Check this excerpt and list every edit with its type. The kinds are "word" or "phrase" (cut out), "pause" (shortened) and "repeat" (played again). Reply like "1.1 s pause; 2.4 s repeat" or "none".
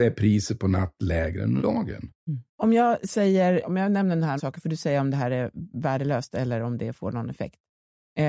1.6 s word; 2.5 s pause; 3.6 s word; 4.4 s word

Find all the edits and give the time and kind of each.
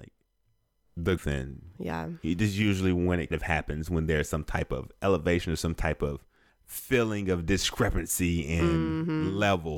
1.2 s word; 3.3 s word; 6.5 s pause

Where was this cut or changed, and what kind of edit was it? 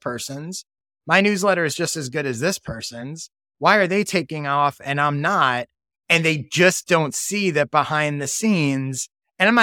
none

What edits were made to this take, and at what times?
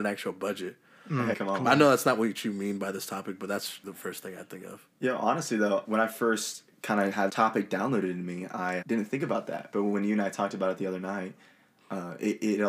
1.3 s word; 3.8 s word; 5.8 s word; 7.3 s word; 8.8 s word

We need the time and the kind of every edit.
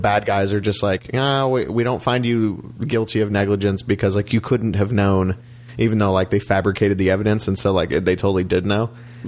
none

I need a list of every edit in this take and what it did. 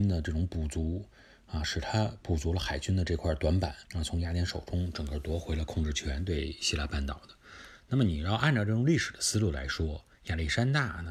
3.9 s pause; 10.1 s pause

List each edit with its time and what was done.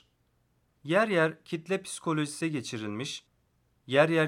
2.4 s word

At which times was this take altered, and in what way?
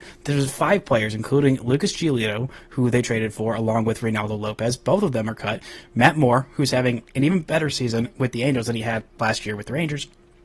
9.1 s pause

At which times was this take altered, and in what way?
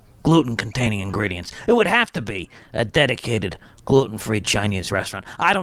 none

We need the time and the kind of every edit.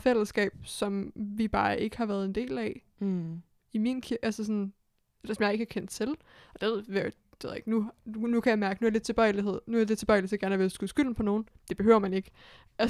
none

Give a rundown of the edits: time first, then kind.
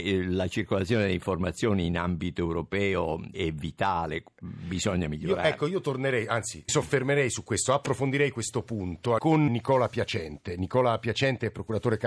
3.3 s word; 6.7 s word; 9.5 s word

